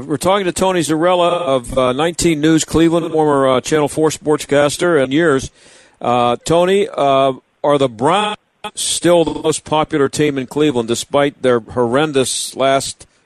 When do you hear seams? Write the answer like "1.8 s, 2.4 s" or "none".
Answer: 5.0 s